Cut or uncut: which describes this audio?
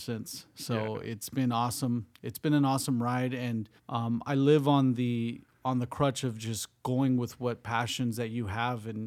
cut